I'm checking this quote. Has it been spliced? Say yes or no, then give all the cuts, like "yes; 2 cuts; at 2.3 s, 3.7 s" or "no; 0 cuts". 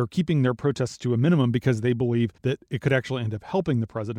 yes; 1 cut; at 2.4 s